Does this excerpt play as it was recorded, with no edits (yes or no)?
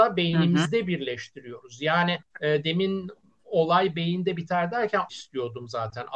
no